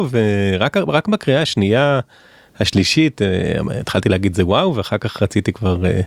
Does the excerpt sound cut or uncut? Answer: uncut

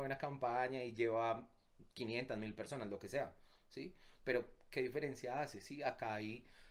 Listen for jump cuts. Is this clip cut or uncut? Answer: uncut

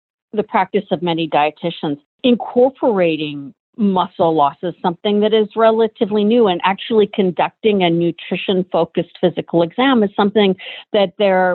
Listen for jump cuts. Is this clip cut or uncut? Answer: uncut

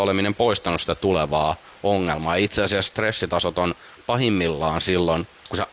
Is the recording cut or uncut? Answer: uncut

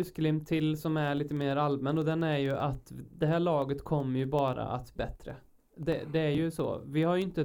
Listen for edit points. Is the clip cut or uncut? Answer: cut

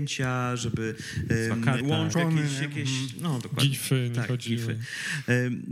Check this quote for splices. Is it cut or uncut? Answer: cut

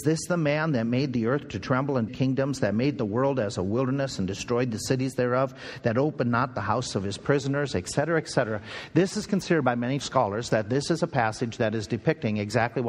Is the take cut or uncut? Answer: cut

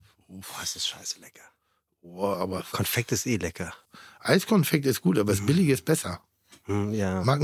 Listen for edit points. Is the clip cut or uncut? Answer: cut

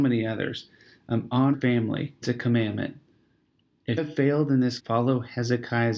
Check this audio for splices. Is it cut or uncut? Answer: cut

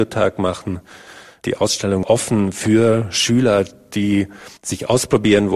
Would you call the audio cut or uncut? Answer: cut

